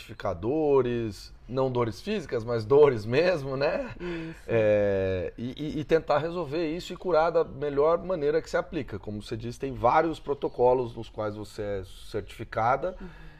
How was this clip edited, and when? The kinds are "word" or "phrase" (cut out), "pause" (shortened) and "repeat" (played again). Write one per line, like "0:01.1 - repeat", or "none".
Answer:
none